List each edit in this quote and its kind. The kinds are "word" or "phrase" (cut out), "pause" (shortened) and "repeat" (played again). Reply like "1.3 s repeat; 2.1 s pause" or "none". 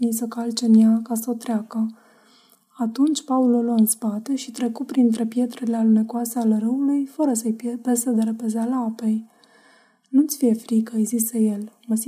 none